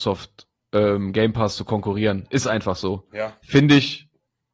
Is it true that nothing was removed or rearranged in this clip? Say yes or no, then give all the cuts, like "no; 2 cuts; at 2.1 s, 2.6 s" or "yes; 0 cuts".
yes; 0 cuts